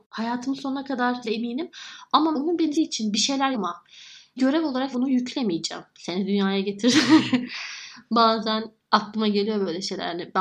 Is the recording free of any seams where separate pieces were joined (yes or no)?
no